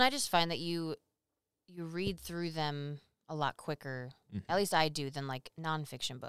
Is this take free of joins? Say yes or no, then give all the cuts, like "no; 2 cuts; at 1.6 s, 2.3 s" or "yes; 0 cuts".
yes; 0 cuts